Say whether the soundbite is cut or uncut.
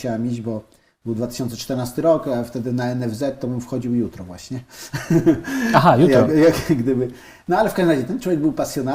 uncut